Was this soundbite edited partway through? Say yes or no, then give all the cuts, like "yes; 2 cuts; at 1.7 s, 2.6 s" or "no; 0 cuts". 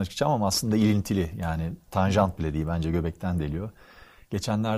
no; 0 cuts